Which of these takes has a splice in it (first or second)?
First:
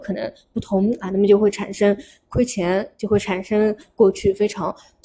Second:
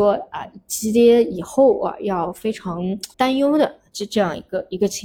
second